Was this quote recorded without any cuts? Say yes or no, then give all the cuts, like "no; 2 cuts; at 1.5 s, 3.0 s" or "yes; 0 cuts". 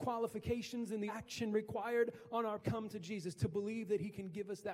no; 2 cuts; at 1.1 s, 2.6 s